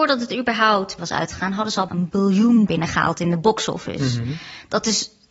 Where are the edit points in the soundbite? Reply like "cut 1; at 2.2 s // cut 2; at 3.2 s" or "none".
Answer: cut 1; at 1.0 s // cut 2; at 1.9 s // cut 3; at 2.7 s